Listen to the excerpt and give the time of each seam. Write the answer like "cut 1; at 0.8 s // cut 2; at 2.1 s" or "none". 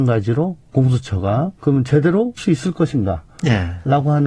cut 1; at 1.6 s // cut 2; at 2.4 s